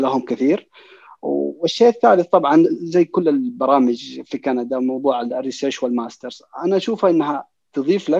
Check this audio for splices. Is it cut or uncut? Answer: uncut